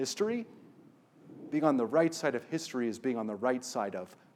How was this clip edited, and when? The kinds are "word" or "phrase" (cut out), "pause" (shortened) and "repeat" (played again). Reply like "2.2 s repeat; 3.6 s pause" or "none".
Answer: none